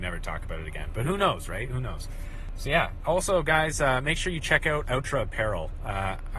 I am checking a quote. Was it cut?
no; 0 cuts

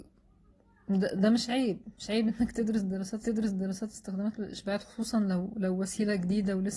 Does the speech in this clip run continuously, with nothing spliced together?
no; 1 cut; at 3.2 s

